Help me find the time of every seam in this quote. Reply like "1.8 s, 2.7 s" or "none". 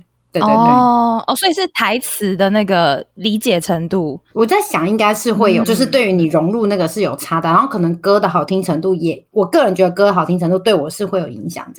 5.6 s